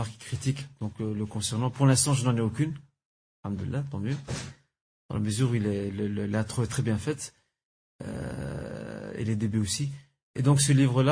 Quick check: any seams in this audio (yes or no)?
no